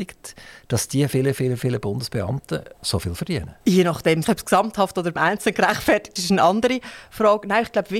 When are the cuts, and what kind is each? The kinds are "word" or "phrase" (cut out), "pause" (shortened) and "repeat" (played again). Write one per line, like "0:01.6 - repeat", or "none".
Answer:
0:01.1 - word
0:02.7 - pause
0:03.6 - pause
0:04.2 - word
0:05.2 - word
0:06.2 - word